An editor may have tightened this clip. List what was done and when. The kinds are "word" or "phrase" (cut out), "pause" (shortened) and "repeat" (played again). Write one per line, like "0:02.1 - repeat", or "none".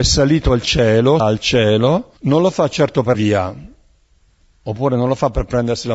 0:01.2 - word
0:02.2 - pause
0:03.1 - word